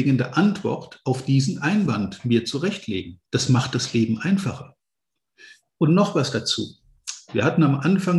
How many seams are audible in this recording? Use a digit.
1